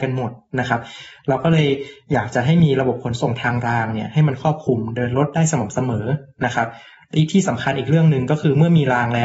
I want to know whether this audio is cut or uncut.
uncut